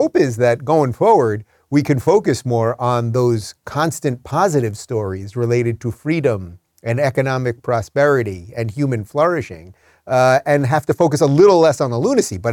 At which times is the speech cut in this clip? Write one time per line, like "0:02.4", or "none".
none